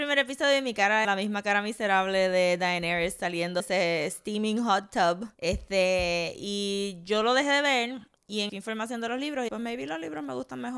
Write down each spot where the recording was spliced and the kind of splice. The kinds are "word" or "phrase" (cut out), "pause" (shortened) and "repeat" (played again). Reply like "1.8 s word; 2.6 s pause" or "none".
1.0 s word; 3.6 s word; 5.3 s pause; 8.2 s pause; 8.5 s phrase; 9.5 s phrase